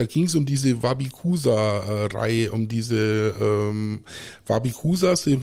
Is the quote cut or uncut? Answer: uncut